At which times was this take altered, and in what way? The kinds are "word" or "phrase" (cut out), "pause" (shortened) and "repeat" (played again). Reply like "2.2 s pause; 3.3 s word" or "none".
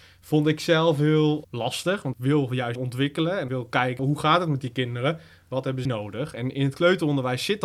1.4 s word; 2.1 s word; 2.7 s word; 3.5 s word; 4.0 s word; 5.8 s word